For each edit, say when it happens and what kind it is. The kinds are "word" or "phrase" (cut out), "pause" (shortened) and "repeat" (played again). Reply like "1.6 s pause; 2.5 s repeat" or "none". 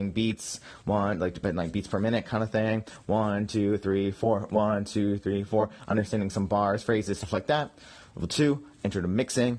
none

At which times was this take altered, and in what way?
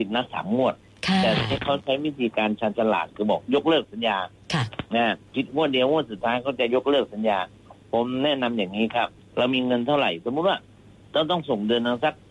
4.9 s pause; 9.2 s pause; 10.9 s pause

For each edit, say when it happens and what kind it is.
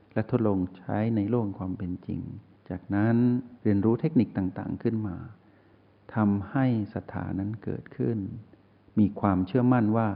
2.5 s pause

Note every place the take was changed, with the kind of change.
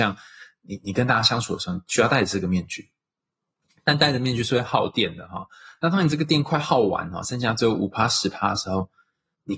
none

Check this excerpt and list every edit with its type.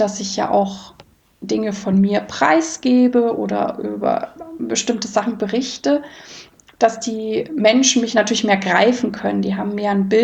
none

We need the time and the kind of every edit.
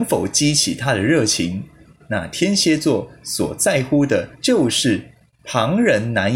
4.3 s pause

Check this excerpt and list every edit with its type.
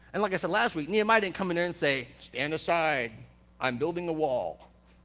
none

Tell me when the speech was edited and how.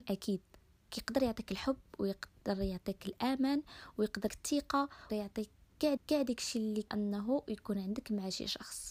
4.3 s word; 5.1 s word; 6.0 s repeat; 6.9 s word

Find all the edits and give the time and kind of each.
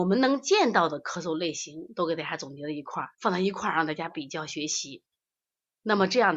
3.1 s pause

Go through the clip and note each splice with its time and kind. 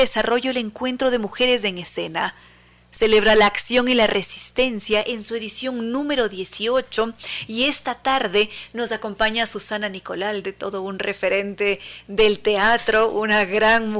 none

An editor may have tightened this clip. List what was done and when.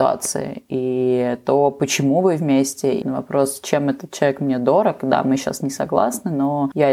3.0 s word

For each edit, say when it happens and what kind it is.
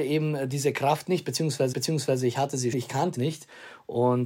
1.7 s repeat; 2.7 s word; 3.2 s phrase

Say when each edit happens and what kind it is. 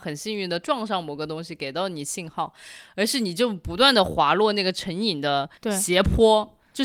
5.6 s pause

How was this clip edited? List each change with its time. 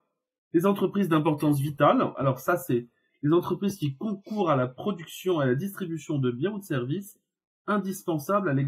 none

